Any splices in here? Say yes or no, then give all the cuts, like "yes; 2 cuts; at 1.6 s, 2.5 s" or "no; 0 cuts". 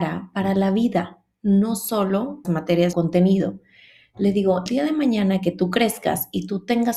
yes; 3 cuts; at 2.4 s, 2.9 s, 4.7 s